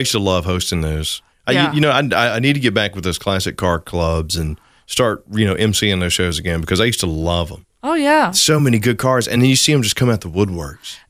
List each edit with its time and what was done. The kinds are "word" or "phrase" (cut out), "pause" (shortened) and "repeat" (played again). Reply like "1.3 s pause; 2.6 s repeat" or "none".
none